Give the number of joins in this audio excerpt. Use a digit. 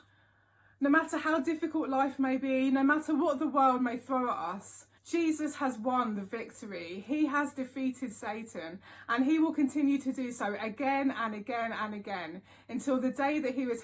1